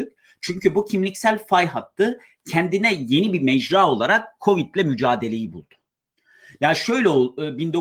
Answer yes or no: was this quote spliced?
no